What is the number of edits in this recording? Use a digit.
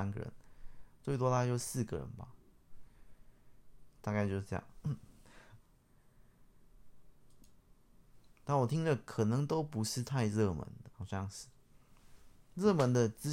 1